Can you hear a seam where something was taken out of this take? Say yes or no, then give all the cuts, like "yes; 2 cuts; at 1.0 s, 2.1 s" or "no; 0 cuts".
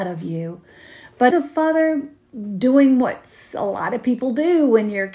yes; 1 cut; at 1.3 s